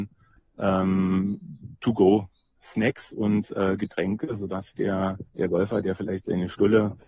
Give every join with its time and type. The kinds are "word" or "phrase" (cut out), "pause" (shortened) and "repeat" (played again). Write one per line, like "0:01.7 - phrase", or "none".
0:05.3 - pause